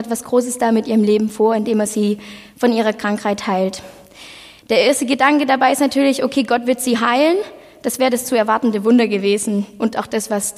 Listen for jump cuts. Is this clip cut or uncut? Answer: uncut